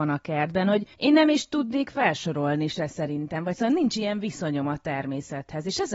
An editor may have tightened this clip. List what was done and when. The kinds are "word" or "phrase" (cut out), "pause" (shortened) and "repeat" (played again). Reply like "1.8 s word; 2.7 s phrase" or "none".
0.9 s pause